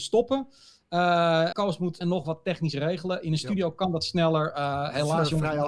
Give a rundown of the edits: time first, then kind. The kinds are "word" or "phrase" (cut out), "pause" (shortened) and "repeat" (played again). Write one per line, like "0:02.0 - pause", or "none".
0:01.5 - word
0:02.0 - phrase